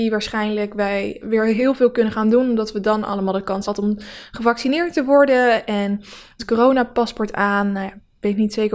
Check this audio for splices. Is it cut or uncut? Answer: cut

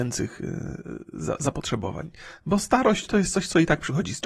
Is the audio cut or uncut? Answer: uncut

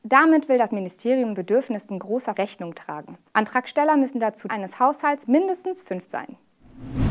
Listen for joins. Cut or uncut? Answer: cut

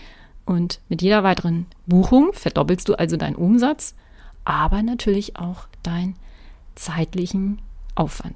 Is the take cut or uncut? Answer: uncut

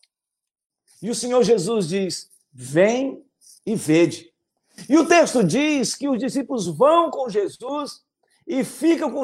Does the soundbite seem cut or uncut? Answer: uncut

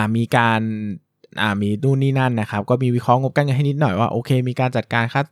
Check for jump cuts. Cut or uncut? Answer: uncut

